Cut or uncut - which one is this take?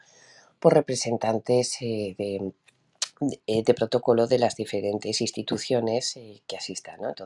uncut